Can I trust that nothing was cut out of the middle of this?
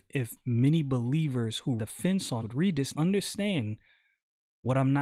no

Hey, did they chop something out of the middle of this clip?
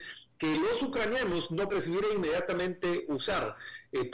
yes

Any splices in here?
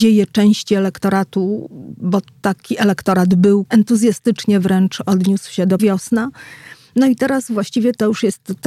yes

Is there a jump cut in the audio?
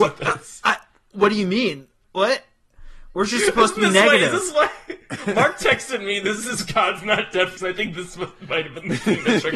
yes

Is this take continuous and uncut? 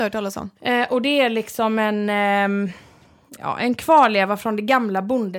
no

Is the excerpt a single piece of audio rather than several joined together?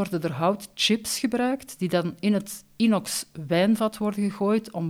yes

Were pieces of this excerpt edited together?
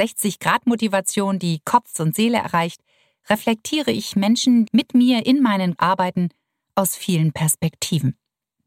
yes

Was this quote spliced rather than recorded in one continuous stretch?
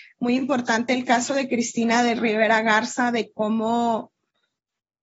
no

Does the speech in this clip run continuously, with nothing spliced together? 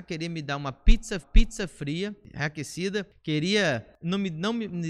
no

